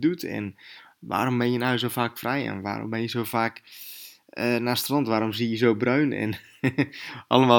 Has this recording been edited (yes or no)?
no